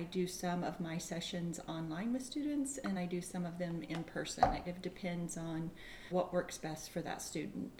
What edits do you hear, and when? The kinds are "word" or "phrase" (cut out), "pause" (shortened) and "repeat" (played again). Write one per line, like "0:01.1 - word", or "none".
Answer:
0:03.0 - word
0:04.7 - word
0:06.1 - word